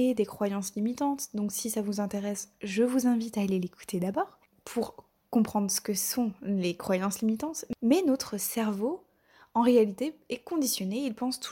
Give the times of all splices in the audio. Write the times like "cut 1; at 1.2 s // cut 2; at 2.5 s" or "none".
none